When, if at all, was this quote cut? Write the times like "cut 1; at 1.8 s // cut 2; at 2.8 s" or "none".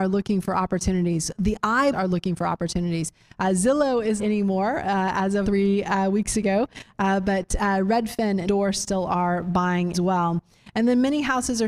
cut 1; at 1.9 s // cut 2; at 4.2 s // cut 3; at 5.4 s // cut 4; at 8.5 s // cut 5; at 9.9 s